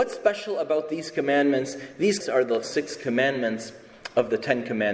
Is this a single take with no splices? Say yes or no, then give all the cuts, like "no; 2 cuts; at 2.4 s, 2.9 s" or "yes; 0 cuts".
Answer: no; 2 cuts; at 2.2 s, 2.6 s